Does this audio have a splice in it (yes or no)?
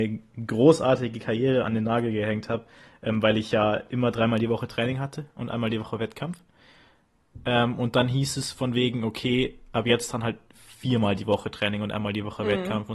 no